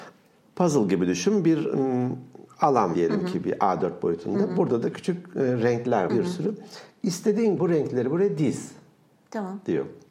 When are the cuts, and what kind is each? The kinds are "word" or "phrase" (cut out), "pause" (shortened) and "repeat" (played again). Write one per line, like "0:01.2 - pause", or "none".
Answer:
0:02.9 - word
0:04.9 - word
0:06.1 - word
0:07.6 - word